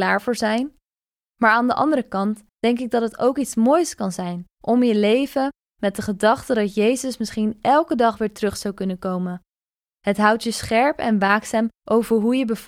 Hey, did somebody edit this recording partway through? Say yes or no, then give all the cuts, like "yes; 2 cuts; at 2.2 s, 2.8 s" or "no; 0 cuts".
yes; 3 cuts; at 2.5 s, 4.5 s, 11.8 s